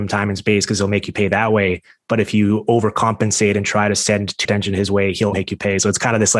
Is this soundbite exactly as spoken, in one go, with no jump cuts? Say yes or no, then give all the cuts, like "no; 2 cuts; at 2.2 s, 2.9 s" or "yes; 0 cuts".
no; 2 cuts; at 4.4 s, 5.3 s